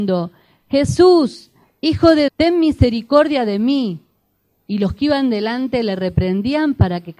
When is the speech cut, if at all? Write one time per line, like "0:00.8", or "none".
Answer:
0:02.3